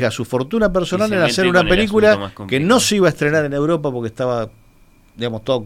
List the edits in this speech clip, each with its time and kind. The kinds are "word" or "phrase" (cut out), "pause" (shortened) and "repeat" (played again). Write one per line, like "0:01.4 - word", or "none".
none